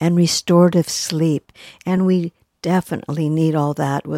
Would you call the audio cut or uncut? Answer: uncut